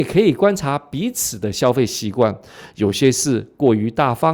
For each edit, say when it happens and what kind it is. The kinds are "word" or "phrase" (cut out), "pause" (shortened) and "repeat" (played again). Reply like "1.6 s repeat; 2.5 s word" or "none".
none